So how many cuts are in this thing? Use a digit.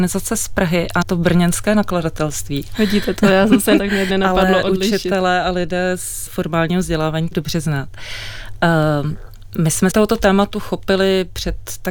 6